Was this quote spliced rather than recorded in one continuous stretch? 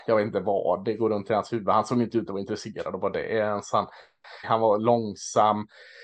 yes; 1 cut; at 4.4 s

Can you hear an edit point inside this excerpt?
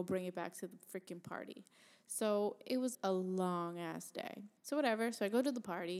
yes; 2 cuts; at 2.9 s, 4.6 s

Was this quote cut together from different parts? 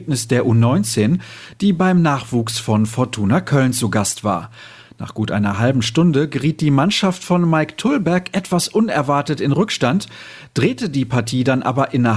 no; 0 cuts

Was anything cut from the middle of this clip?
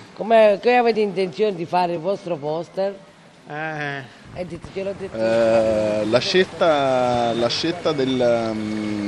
no; 0 cuts

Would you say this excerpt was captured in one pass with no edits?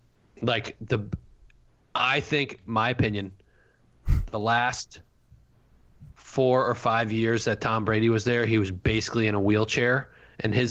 no; 1 cut; at 6.1 s

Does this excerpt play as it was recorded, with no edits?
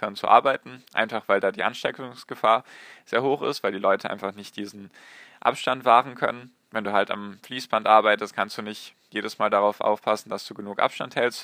yes; 0 cuts

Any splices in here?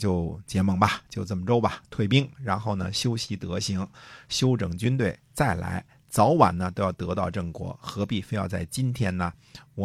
no; 0 cuts

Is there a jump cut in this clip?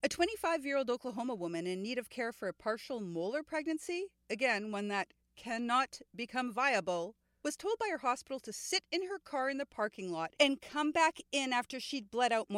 no; 0 cuts

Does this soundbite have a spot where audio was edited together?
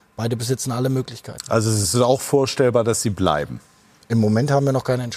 no; 0 cuts

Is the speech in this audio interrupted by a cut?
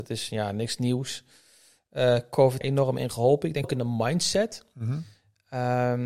yes; 2 cuts; at 2.6 s, 3.6 s

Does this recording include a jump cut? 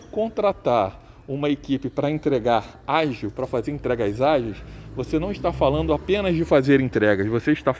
no; 0 cuts

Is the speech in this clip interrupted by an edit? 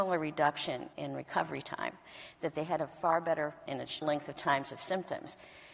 yes; 3 cuts; at 0.9 s, 3.7 s, 4.0 s

